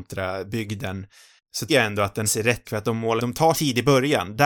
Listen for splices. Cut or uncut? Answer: cut